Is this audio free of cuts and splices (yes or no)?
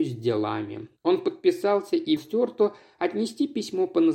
no